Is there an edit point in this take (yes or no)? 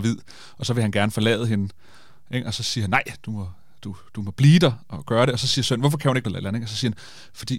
yes